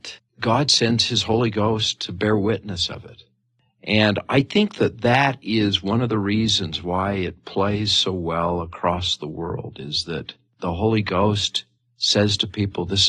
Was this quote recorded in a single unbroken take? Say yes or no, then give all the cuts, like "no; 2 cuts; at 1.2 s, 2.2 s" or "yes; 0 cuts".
yes; 0 cuts